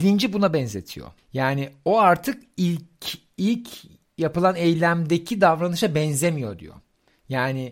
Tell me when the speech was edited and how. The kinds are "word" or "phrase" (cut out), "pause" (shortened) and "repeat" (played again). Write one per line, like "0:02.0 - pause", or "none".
none